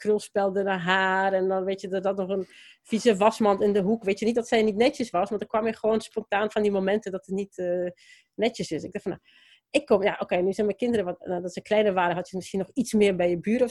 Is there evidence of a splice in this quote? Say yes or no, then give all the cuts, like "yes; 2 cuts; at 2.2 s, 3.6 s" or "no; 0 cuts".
no; 0 cuts